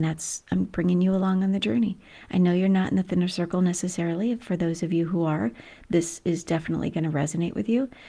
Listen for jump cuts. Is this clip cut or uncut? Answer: uncut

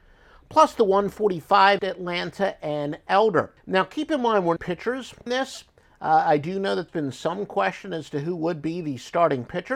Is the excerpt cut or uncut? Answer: cut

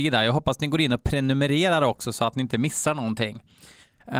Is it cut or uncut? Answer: uncut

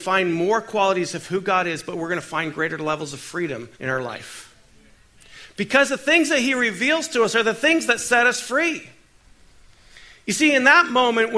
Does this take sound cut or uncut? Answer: cut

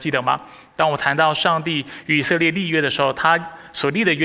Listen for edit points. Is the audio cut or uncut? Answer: uncut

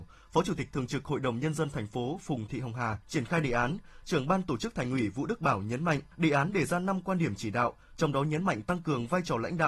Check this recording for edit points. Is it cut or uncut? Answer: cut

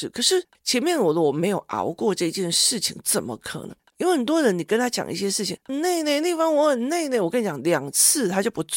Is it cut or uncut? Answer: cut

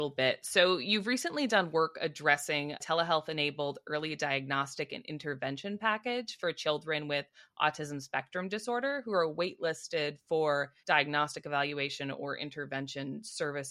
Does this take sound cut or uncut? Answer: cut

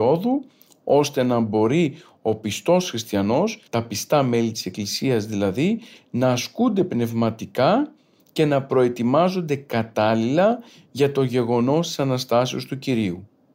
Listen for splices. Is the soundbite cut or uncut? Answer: cut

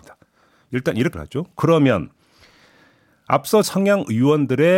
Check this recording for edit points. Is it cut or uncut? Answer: cut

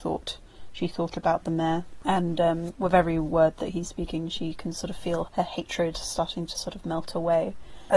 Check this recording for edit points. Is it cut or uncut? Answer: cut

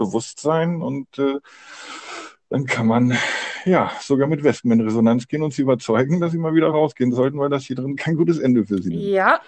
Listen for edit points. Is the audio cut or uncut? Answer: uncut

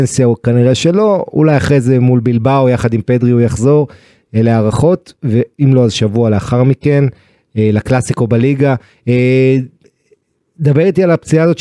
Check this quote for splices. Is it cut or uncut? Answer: uncut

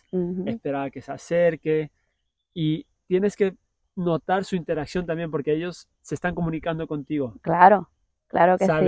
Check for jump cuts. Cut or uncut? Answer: uncut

